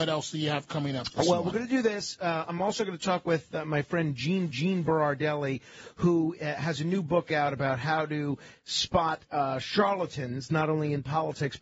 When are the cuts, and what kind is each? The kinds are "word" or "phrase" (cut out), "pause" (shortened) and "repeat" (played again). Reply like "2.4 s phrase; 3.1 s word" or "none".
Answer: 4.5 s repeat